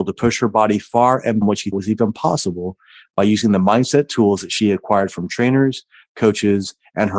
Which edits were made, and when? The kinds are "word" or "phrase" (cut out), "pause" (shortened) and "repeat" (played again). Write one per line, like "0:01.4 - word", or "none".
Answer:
0:01.4 - word
0:01.7 - word